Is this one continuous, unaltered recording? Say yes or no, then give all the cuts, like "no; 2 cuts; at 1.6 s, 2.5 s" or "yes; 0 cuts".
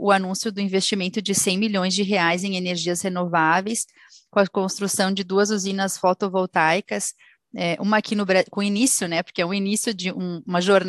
yes; 0 cuts